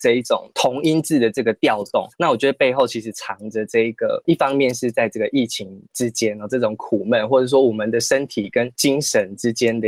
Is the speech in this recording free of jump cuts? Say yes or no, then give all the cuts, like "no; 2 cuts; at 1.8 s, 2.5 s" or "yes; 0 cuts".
no; 2 cuts; at 2.1 s, 5.8 s